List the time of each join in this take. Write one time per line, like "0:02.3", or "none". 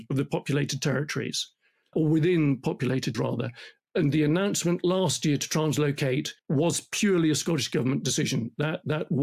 0:01.9
0:03.1
0:03.8
0:06.4